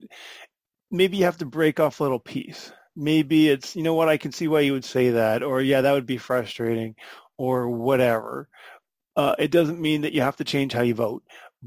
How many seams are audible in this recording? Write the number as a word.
zero